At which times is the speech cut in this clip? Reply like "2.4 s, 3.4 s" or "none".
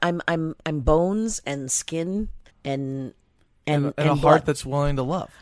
2.5 s